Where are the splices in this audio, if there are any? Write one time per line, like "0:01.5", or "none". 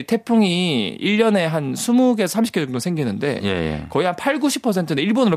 none